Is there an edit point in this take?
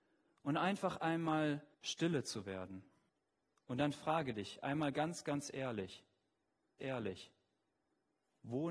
yes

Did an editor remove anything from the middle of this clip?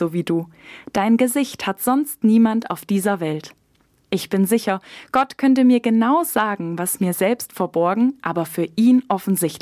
no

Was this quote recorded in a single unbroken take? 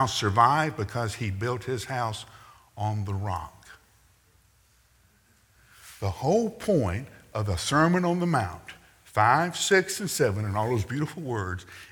yes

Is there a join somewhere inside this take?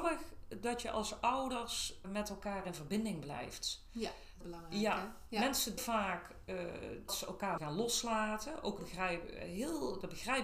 yes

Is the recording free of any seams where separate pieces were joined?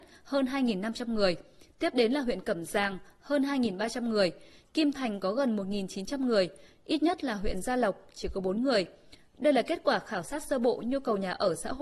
yes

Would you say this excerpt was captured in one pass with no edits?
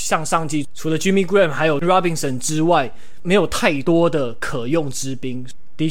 no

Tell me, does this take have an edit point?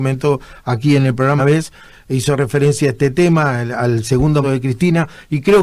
yes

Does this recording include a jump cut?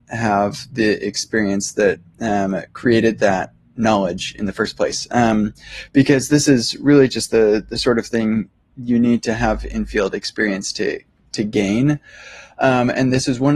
no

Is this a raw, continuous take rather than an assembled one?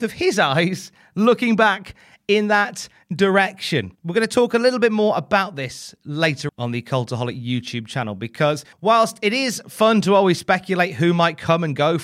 no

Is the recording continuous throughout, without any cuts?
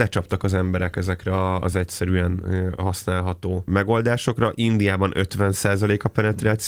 yes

